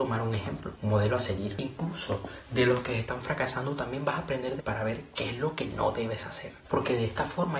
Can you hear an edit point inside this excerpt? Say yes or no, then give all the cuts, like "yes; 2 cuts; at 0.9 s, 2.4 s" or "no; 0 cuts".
yes; 1 cut; at 4.6 s